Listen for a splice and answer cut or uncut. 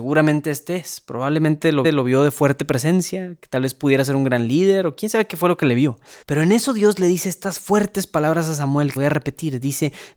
cut